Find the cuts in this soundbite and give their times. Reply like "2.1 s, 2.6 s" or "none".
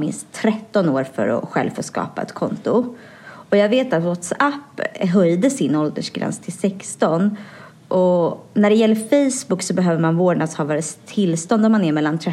none